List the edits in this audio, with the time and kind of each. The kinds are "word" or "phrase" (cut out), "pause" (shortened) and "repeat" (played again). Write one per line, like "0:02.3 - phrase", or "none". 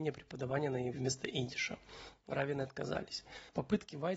0:00.9 - word

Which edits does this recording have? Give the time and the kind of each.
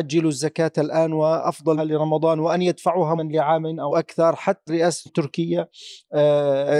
0:01.8 - phrase
0:03.2 - word
0:03.9 - phrase
0:04.7 - word
0:05.1 - word

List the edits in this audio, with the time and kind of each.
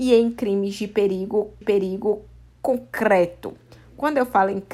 0:01.6 - repeat

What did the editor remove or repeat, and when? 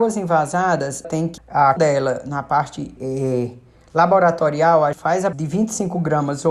0:01.0 - word
0:01.4 - word
0:01.8 - word
0:03.0 - word
0:04.9 - word
0:05.3 - word

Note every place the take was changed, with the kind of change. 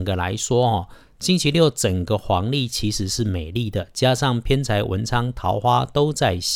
none

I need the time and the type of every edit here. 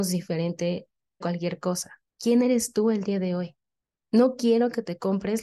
0:01.2 - word
0:02.1 - pause
0:03.8 - pause

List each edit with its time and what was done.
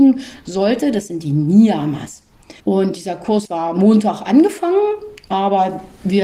0:02.6 - pause
0:03.5 - word

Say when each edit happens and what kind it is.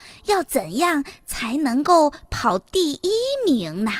none

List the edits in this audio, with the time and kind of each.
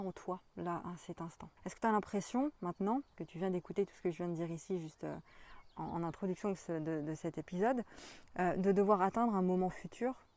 0:01.6 - pause
0:03.1 - pause

